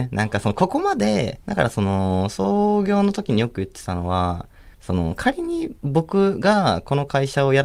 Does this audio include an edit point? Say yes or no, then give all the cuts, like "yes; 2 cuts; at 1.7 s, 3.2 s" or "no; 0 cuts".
yes; 2 cuts; at 1.4 s, 4.7 s